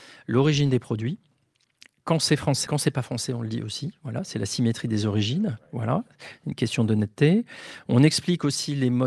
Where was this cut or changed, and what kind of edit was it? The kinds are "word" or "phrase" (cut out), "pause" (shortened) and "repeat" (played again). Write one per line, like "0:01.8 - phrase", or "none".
0:02.7 - phrase

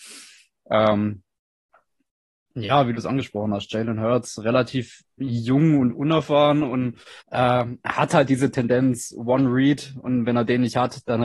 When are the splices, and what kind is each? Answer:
0:07.2 - pause

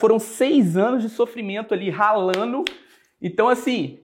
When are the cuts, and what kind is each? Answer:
none

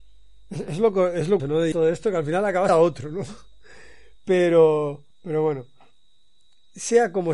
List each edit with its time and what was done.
0:01.4 - word
0:01.7 - word
0:02.7 - phrase
0:05.1 - pause

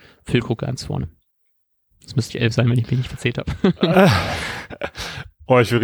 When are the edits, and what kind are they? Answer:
0:02.3 - word

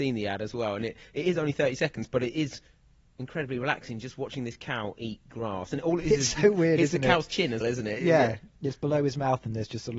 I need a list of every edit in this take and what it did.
0:07.6 - word

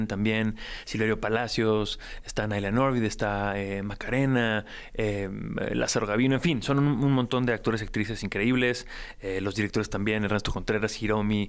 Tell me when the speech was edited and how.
none

